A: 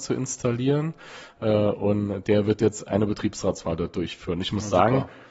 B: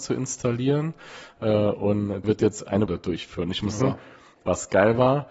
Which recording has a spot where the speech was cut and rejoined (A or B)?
B